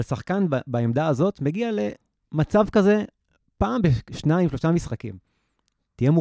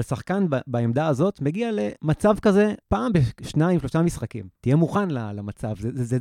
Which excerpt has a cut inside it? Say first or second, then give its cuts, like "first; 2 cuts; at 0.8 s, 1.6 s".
second; 3 cuts; at 2.0 s, 2.8 s, 4.5 s